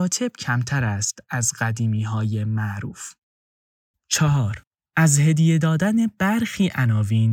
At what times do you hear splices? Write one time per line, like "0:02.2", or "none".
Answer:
0:03.7

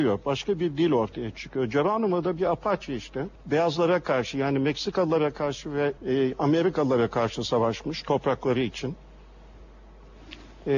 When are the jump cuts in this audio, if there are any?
0:03.4
0:06.0

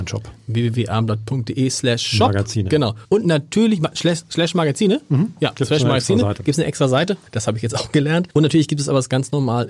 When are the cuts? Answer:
0:03.0
0:07.3
0:08.3

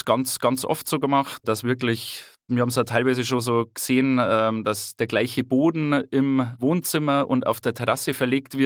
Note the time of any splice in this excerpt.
none

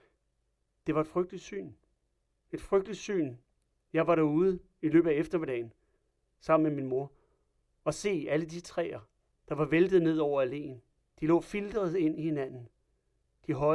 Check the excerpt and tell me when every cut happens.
none

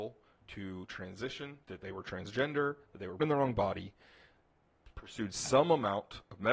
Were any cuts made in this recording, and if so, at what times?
0:01.6
0:03.2
0:04.9

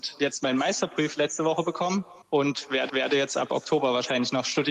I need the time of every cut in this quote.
0:02.2
0:02.9

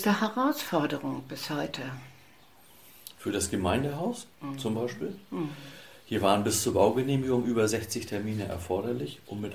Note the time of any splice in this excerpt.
0:04.3

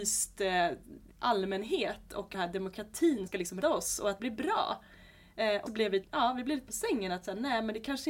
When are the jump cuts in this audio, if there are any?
0:01.1
0:02.3
0:03.3
0:03.6
0:04.2
0:05.7
0:06.0
0:06.7

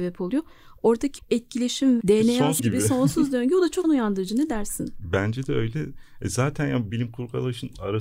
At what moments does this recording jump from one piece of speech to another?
0:01.2
0:02.0
0:02.6
0:03.8
0:06.9

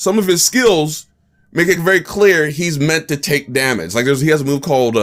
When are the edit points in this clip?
none

